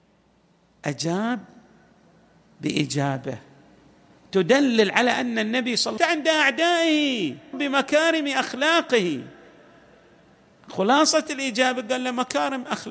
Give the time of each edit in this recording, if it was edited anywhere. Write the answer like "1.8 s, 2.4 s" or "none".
6.0 s, 7.5 s